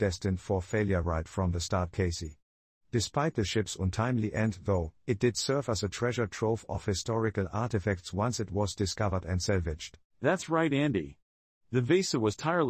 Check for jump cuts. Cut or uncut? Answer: uncut